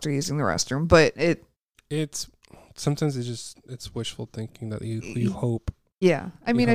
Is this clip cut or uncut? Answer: uncut